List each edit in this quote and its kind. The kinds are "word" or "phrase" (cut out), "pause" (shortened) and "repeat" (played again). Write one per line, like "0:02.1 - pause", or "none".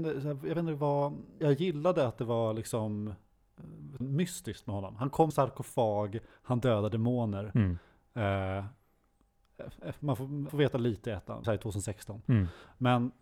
0:01.4 - word
0:04.0 - word
0:05.3 - word
0:10.5 - word
0:11.4 - word